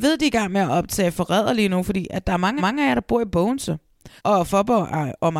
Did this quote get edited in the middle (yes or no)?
yes